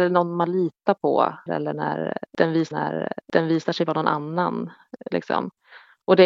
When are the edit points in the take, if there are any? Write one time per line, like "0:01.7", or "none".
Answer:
0:01.5
0:02.7